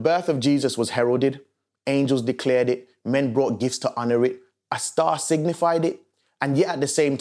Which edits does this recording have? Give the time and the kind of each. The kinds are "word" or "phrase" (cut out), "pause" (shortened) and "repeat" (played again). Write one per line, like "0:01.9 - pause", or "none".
none

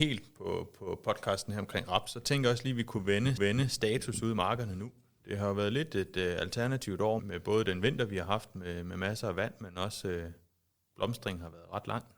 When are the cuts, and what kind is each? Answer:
0:03.4 - repeat
0:07.2 - word

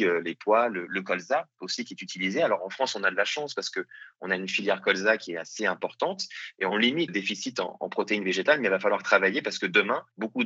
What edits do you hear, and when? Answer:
0:07.1 - phrase

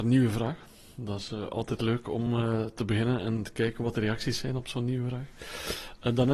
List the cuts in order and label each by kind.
none

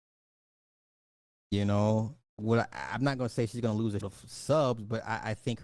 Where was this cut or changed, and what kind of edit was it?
0:02.3 - pause
0:04.0 - word

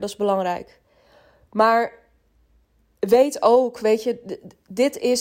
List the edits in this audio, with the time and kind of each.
none

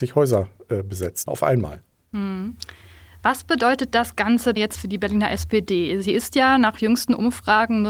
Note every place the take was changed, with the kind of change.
0:01.3 - word
0:04.6 - word

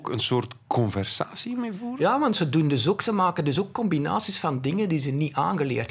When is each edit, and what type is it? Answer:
none

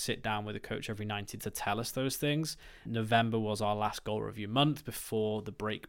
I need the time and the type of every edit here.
0:01.4 - word
0:02.9 - word

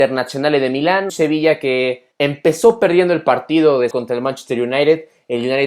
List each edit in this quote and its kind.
0:01.1 - word
0:02.1 - pause
0:03.9 - word

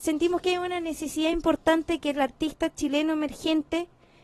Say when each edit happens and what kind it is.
none

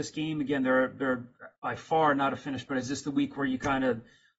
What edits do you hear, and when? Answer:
0:01.6 - pause
0:02.7 - word

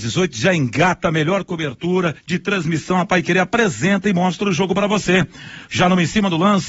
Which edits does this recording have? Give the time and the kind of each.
0:02.2 - pause

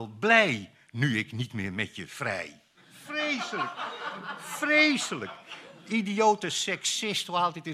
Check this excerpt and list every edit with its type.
none

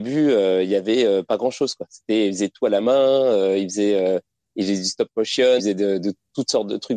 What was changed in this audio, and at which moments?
0:05.6 - word

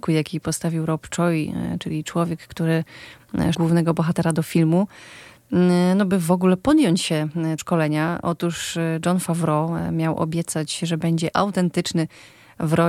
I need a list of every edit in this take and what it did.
0:03.5 - word
0:07.6 - word
0:11.3 - word

